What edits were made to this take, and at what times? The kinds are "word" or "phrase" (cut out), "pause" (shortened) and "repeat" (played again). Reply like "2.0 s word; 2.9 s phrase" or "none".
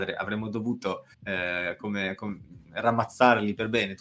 1.1 s pause